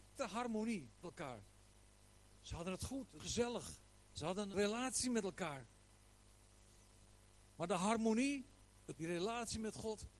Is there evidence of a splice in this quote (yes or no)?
yes